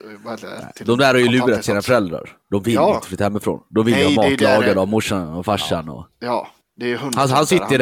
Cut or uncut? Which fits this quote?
cut